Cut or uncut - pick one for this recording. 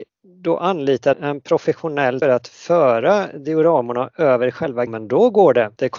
cut